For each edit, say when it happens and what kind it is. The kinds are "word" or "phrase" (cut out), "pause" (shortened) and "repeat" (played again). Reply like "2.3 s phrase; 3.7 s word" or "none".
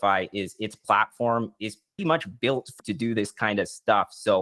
2.0 s word; 2.8 s word